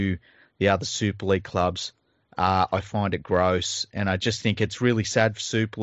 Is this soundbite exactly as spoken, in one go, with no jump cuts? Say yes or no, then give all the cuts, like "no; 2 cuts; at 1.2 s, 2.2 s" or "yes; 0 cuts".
yes; 0 cuts